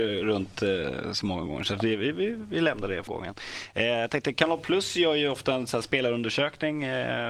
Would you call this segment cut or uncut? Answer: cut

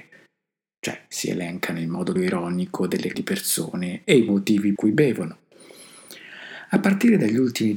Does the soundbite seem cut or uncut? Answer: cut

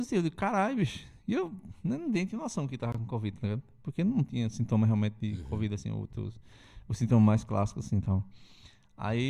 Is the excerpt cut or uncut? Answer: uncut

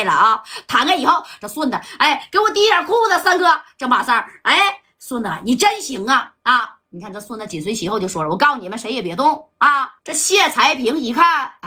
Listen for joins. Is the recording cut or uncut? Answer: cut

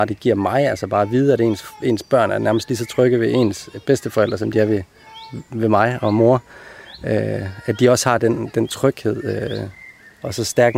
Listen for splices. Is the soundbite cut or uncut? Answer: uncut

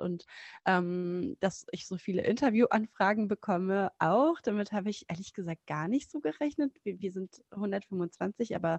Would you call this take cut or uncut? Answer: uncut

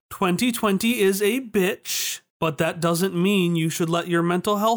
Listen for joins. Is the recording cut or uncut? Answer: uncut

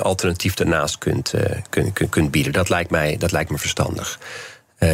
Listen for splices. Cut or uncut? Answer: cut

